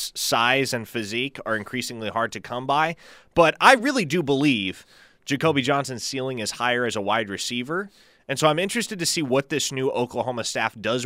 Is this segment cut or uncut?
uncut